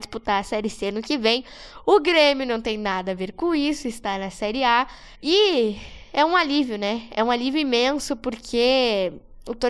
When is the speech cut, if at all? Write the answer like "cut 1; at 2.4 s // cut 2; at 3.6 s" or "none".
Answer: cut 1; at 5.1 s

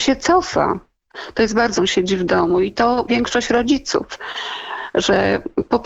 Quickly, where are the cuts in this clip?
cut 1; at 1.8 s // cut 2; at 3.1 s

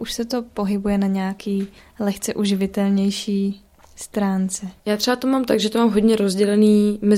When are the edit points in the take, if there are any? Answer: cut 1; at 1.8 s // cut 2; at 4.8 s

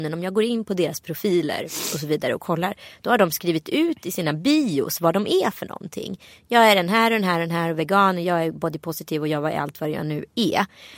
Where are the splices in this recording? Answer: none

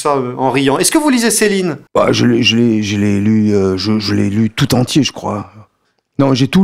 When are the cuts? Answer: cut 1; at 1.9 s

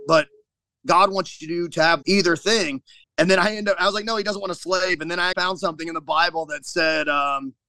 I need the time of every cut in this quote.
cut 1; at 2.0 s // cut 2; at 3.0 s // cut 3; at 5.3 s

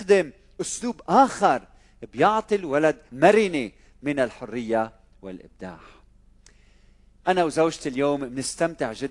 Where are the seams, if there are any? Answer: cut 1; at 3.1 s

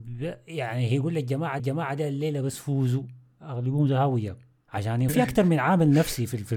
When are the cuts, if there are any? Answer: cut 1; at 1.6 s // cut 2; at 5.1 s

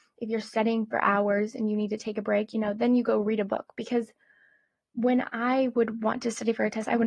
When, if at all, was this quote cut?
none

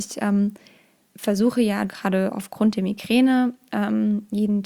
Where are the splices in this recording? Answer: cut 1; at 1.9 s

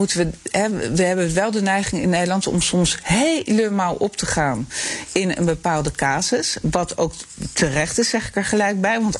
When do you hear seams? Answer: none

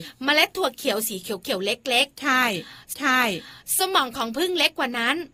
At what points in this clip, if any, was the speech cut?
cut 1; at 2.9 s

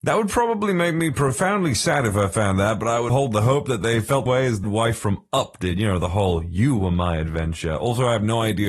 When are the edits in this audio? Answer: cut 1; at 3.1 s // cut 2; at 4.3 s // cut 3; at 4.6 s

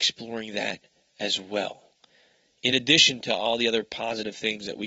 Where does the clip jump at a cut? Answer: none

